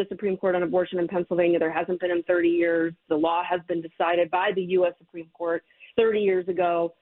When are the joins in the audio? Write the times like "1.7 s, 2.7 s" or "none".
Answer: 5.9 s